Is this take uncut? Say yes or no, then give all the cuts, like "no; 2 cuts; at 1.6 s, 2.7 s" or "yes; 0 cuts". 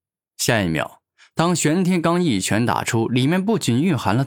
yes; 0 cuts